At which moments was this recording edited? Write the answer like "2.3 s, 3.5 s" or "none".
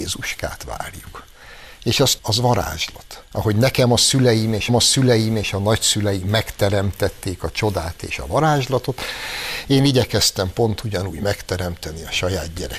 2.2 s, 3.2 s, 4.7 s